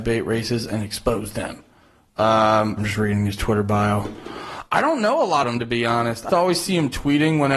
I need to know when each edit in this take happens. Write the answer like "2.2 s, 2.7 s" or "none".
2.8 s, 5.4 s, 6.3 s